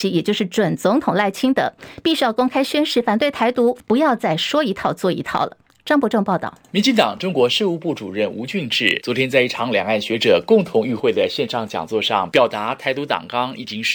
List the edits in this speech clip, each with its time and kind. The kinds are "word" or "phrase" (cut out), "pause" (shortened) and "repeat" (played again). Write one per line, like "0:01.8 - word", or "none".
0:03.8 - phrase